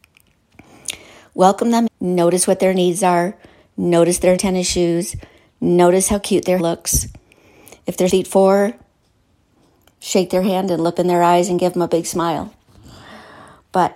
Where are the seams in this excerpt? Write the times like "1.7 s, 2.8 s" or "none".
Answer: 1.9 s, 4.4 s, 6.6 s, 8.1 s, 10.9 s